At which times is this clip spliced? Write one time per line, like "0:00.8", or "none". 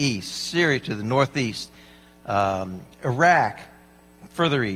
none